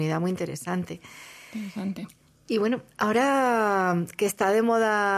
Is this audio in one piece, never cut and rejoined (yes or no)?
yes